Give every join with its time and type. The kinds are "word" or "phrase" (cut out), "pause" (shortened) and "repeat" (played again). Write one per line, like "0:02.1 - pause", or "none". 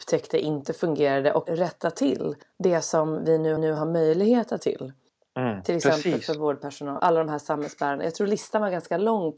0:01.5 - word
0:02.4 - pause
0:03.6 - repeat
0:04.6 - word
0:05.1 - pause
0:07.0 - word